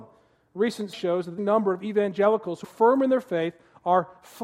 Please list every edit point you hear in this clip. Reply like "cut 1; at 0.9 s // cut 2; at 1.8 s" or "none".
cut 1; at 0.9 s // cut 2; at 1.4 s // cut 3; at 2.6 s